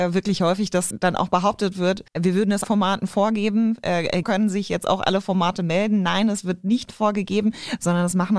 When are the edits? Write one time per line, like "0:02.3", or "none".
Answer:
0:00.9
0:02.1
0:02.6
0:04.2